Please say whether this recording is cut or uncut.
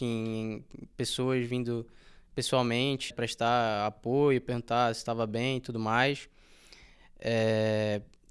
cut